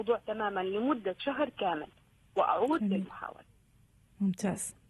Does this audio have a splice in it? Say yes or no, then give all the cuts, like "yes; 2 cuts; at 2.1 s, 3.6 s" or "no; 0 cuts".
no; 0 cuts